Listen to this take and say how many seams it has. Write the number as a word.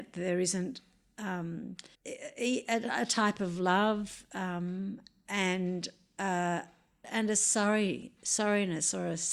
two